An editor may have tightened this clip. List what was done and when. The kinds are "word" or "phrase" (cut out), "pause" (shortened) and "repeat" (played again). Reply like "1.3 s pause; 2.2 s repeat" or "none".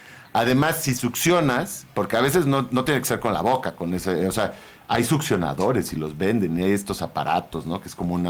none